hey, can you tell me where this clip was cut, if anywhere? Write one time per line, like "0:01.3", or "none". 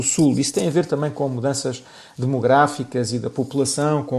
none